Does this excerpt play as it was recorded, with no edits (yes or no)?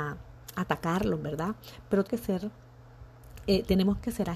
no